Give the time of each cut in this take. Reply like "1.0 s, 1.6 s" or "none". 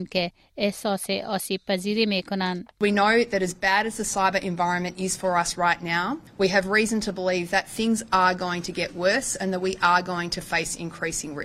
6.3 s